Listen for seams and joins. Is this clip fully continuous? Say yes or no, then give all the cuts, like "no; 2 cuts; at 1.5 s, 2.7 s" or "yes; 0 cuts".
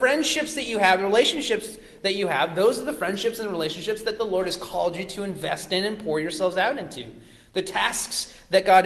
yes; 0 cuts